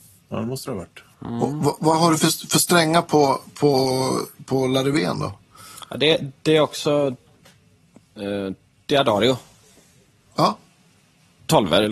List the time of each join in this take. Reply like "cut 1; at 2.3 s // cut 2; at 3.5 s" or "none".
cut 1; at 1.1 s // cut 2; at 8.8 s